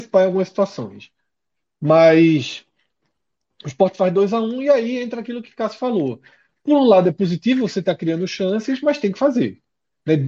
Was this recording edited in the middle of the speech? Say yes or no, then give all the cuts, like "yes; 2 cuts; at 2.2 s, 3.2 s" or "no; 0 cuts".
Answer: no; 0 cuts